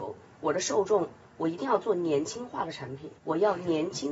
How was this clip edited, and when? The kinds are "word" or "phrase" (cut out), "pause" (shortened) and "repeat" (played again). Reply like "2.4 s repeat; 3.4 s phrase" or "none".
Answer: 3.2 s pause